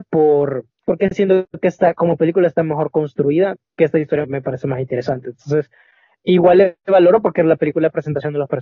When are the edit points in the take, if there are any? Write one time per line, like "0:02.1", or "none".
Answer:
0:03.8
0:04.2
0:06.1